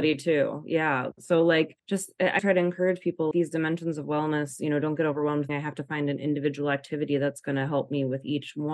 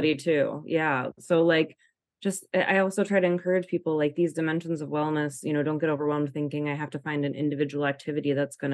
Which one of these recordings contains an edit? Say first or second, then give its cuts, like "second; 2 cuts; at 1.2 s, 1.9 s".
first; 4 cuts; at 1.8 s, 2.4 s, 3.3 s, 5.5 s